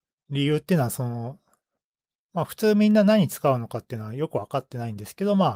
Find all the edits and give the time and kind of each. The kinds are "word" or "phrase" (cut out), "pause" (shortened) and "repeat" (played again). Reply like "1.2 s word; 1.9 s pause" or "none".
none